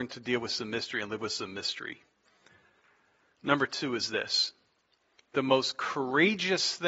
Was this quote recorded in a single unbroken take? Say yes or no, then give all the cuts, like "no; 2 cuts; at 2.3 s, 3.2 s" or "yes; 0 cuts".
yes; 0 cuts